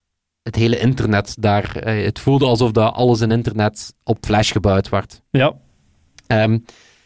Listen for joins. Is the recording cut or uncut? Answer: uncut